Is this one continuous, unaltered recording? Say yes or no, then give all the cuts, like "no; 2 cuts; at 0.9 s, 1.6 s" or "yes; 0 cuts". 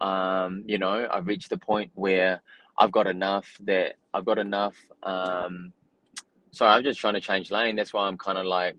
yes; 0 cuts